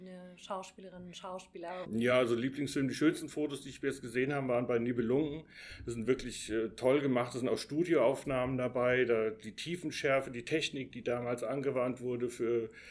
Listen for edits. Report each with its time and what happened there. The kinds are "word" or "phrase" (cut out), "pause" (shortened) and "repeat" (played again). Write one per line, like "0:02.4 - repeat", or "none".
none